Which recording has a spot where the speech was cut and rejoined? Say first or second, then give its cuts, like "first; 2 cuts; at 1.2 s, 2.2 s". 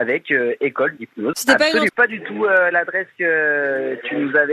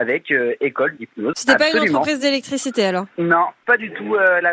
first; 1 cut; at 1.9 s